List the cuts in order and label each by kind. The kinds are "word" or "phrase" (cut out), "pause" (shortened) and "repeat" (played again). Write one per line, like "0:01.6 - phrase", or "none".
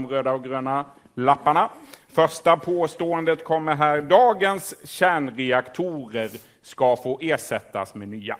none